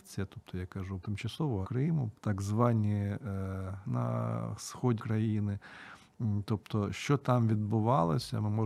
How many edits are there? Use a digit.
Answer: 5